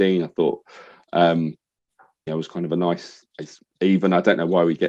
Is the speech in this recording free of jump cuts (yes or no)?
no